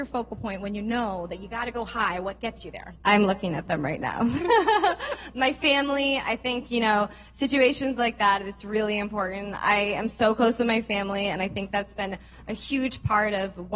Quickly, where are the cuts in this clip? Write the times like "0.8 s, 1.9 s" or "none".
3.0 s